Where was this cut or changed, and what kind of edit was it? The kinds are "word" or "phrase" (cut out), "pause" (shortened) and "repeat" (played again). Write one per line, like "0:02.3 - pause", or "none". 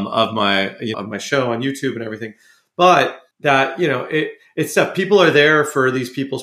0:00.9 - word
0:03.3 - pause